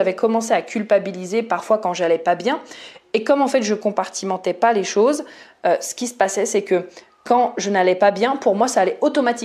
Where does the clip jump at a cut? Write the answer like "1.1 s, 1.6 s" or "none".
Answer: none